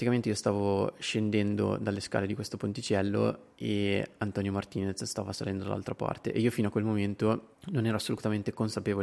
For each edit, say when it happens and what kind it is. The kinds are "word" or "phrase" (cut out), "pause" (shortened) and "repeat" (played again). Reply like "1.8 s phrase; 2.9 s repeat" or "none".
3.5 s pause; 7.5 s pause